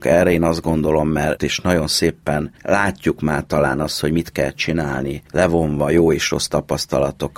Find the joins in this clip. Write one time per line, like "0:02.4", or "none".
0:01.4